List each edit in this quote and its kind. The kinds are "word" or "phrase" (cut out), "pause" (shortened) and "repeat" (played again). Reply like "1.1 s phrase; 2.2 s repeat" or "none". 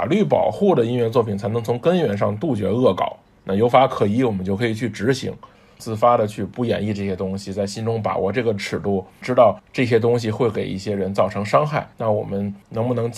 11.9 s pause